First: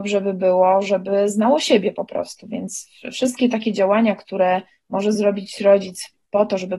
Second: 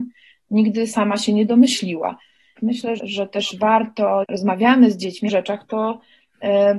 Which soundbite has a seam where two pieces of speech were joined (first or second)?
second